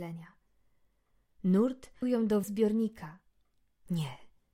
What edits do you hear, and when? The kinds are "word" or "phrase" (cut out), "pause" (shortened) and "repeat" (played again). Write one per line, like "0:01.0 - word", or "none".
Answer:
0:02.0 - word
0:02.4 - word